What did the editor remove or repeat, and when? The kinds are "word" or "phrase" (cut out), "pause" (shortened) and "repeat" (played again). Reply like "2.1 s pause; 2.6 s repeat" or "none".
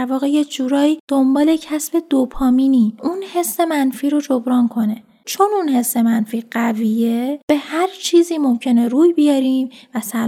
3.0 s word; 5.2 s word